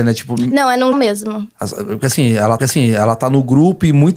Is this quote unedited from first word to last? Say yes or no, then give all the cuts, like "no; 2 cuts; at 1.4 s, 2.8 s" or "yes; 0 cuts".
no; 2 cuts; at 0.9 s, 2.6 s